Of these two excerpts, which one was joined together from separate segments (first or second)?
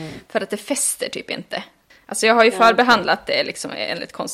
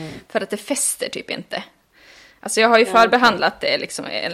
first